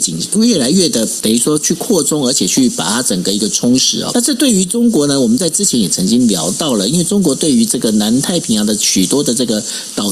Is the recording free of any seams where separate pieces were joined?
no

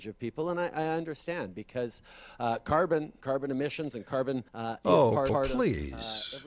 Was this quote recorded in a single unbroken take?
no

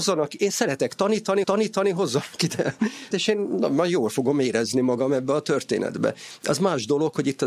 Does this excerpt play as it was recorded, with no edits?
no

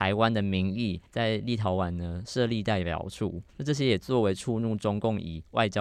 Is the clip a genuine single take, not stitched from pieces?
no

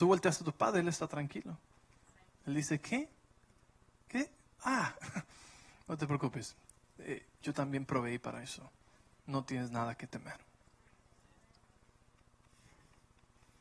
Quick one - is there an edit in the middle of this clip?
no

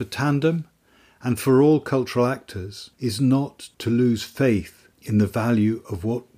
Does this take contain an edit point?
yes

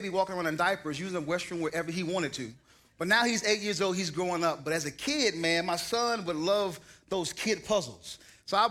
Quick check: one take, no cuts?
yes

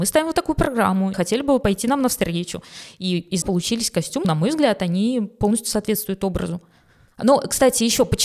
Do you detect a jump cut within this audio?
yes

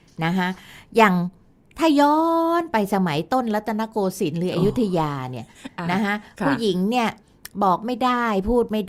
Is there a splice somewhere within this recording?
no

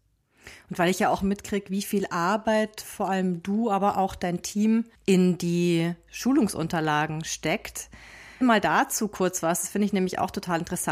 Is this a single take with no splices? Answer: no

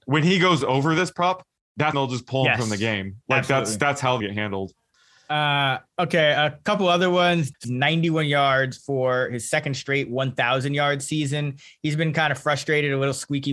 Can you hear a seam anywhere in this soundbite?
yes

